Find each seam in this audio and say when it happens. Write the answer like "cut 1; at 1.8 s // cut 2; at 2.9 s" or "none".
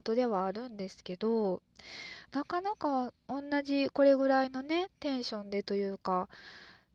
cut 1; at 3.3 s